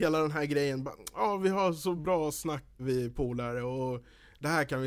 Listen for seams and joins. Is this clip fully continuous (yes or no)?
no